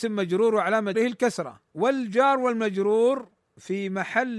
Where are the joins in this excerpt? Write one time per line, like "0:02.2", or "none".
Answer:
0:00.9
0:01.7